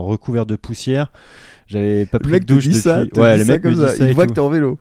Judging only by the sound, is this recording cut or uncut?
uncut